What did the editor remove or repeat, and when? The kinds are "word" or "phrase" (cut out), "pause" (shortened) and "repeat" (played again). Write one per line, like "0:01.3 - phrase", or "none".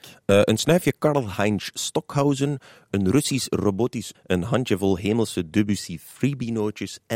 0:04.1 - word